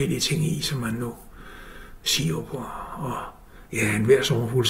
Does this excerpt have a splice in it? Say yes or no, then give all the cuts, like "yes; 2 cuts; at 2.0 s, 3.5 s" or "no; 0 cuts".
no; 0 cuts